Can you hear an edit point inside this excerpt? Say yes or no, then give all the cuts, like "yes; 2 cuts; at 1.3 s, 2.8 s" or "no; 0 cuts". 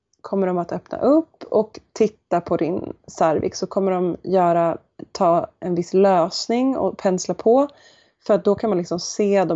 no; 0 cuts